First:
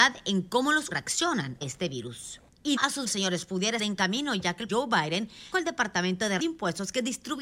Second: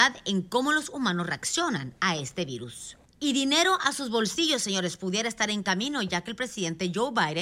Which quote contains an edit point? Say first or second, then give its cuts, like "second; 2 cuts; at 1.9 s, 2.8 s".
first; 8 cuts; at 0.9 s, 1.6 s, 2.8 s, 3.1 s, 3.8 s, 4.7 s, 5.5 s, 6.4 s